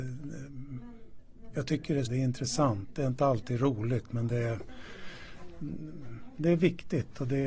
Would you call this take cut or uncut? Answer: cut